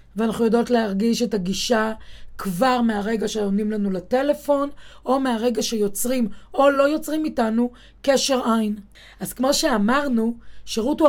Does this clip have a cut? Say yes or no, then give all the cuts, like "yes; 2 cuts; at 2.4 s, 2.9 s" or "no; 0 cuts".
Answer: no; 0 cuts